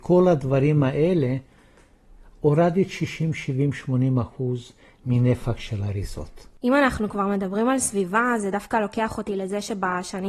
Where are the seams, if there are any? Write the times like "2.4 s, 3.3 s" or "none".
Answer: none